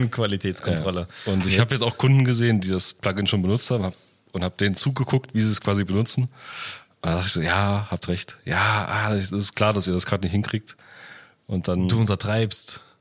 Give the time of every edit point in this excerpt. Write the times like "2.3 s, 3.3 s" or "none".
none